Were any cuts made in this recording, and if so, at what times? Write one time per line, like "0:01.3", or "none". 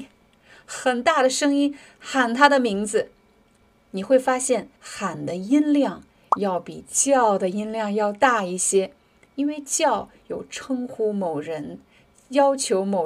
0:04.8